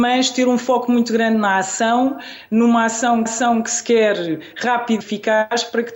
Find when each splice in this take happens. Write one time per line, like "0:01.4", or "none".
0:03.3
0:05.0